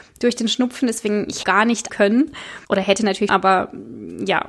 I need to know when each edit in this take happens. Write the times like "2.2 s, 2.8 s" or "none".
1.4 s, 1.9 s, 2.6 s, 3.3 s